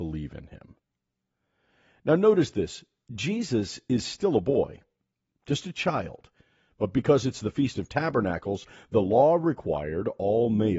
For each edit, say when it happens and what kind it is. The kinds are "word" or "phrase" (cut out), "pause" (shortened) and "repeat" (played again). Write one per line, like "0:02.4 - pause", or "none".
none